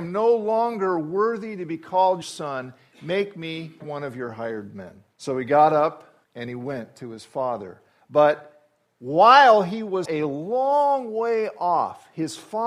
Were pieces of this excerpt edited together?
yes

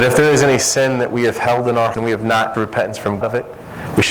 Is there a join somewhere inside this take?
yes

